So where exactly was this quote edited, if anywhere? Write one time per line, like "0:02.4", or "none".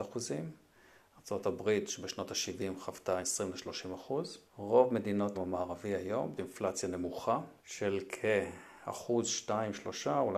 0:03.2
0:04.5
0:05.3
0:06.4
0:07.6